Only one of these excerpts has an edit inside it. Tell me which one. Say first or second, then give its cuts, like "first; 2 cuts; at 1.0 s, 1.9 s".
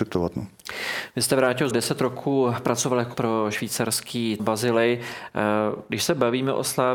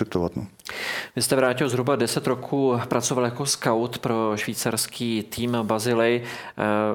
first; 3 cuts; at 1.7 s, 3.1 s, 4.4 s